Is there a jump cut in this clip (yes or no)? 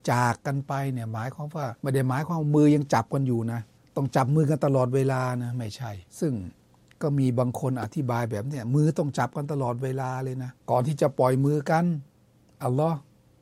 yes